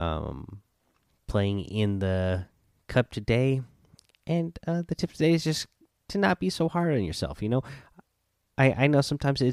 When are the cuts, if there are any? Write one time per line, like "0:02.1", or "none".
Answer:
none